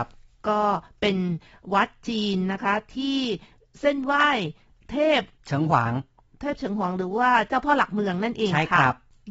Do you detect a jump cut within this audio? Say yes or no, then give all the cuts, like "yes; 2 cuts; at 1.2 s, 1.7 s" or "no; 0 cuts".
no; 0 cuts